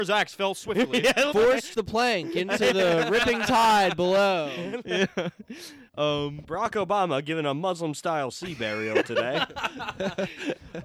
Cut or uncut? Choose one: cut